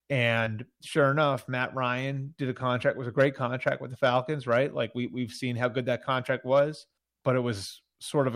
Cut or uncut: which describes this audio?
cut